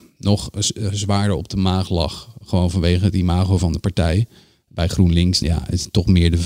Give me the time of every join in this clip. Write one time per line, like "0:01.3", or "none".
0:05.4